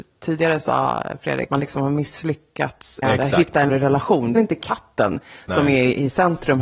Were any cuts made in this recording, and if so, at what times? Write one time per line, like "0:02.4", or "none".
0:01.5
0:03.0
0:03.7
0:04.4